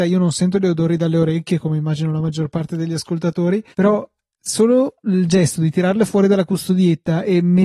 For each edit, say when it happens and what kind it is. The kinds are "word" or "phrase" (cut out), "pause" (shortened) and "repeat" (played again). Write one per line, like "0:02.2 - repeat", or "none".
0:03.7 - pause